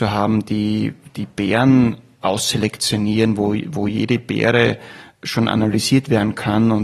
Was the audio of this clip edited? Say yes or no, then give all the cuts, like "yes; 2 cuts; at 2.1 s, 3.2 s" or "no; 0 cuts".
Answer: no; 0 cuts